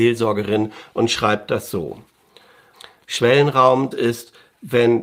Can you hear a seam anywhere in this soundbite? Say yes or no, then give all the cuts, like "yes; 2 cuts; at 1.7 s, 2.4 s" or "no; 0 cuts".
yes; 1 cut; at 3.9 s